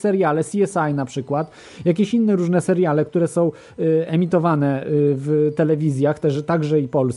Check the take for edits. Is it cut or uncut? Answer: uncut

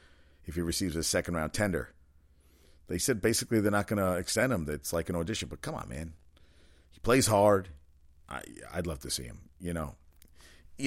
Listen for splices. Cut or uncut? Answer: uncut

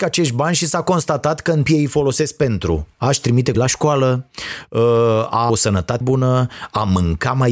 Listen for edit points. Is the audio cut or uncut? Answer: cut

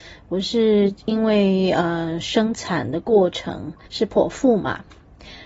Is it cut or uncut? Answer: cut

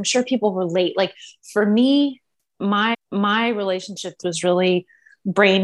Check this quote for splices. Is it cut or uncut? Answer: cut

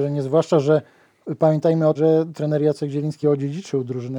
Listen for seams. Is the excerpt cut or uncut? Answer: cut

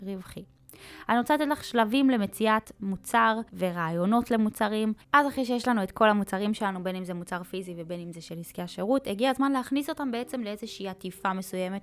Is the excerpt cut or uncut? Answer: cut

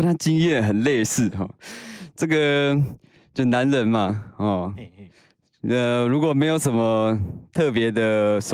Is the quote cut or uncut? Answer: uncut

